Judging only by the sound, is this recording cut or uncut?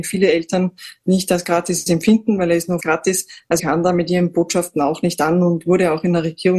cut